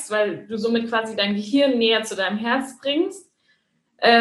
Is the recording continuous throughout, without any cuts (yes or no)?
yes